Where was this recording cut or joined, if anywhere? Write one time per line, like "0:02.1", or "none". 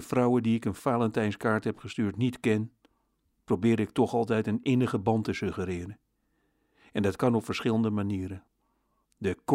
none